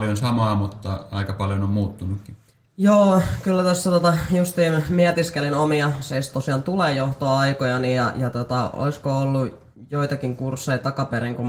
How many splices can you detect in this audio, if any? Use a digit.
1